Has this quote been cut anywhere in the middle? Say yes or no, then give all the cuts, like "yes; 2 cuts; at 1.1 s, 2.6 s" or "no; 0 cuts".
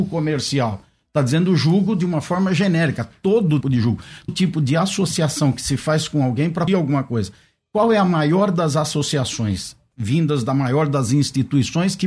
yes; 3 cuts; at 3.6 s, 4.3 s, 6.7 s